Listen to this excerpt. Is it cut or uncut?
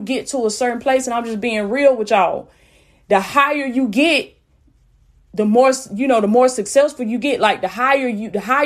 uncut